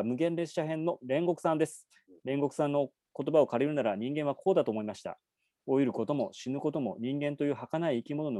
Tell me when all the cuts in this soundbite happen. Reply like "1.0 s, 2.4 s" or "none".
none